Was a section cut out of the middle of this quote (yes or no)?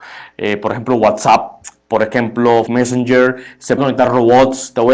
yes